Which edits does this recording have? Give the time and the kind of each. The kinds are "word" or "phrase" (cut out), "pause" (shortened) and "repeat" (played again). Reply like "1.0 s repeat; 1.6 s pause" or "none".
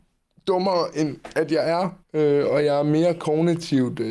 2.0 s pause